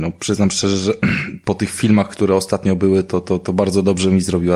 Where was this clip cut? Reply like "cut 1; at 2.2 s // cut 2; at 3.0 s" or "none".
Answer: none